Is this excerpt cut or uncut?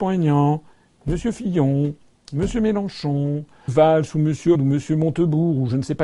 cut